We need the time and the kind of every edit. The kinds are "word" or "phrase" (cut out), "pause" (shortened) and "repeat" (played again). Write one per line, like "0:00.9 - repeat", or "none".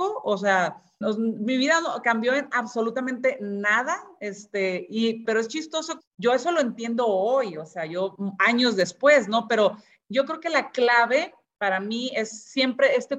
0:01.0 - word
0:05.2 - word
0:06.0 - word
0:08.2 - word